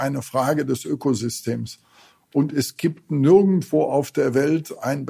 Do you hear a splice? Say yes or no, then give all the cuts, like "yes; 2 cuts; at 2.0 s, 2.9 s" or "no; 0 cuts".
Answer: no; 0 cuts